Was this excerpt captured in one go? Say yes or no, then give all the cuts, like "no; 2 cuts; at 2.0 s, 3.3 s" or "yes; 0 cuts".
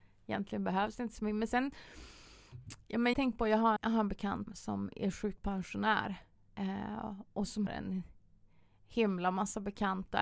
no; 4 cuts; at 3.1 s, 3.8 s, 4.5 s, 7.7 s